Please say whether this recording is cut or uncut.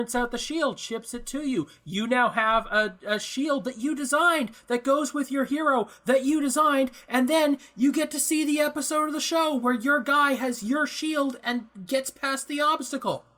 uncut